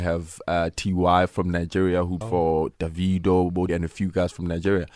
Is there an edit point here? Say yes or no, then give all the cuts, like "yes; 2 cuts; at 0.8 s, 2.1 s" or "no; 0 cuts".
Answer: yes; 2 cuts; at 2.2 s, 3.7 s